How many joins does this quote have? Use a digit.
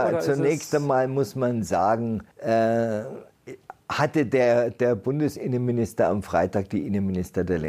1